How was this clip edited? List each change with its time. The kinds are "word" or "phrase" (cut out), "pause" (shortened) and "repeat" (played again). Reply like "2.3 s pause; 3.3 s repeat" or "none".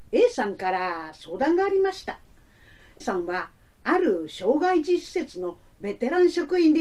3.0 s word